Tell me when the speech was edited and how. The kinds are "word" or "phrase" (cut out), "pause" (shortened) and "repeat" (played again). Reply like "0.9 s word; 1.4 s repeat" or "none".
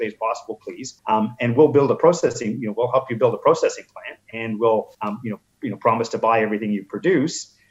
1.0 s pause; 4.9 s pause